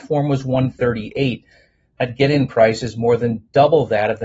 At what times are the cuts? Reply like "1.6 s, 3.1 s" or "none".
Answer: none